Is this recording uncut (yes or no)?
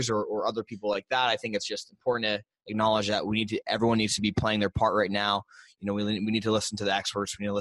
yes